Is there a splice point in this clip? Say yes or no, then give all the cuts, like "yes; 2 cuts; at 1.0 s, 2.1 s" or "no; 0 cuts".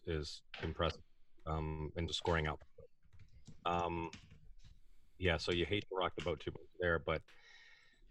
yes; 1 cut; at 2.1 s